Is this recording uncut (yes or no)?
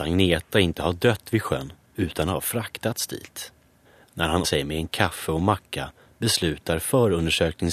no